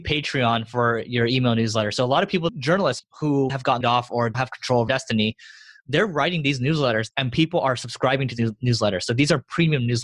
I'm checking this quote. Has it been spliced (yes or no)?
yes